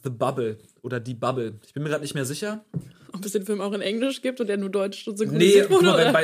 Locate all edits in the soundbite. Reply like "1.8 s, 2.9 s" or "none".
none